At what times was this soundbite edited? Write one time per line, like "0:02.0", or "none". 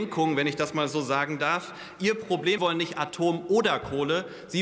0:02.6